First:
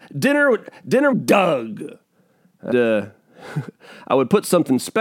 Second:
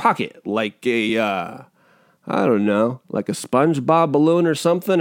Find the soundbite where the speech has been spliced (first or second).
first